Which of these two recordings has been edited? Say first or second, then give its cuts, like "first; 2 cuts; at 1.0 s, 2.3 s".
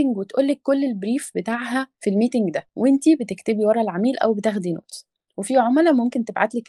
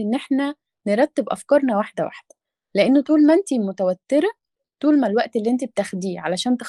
first; 2 cuts; at 1.9 s, 5.3 s